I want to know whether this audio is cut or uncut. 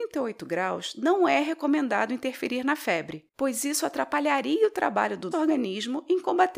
cut